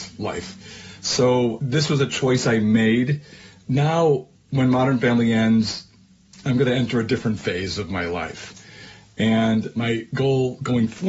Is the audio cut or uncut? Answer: uncut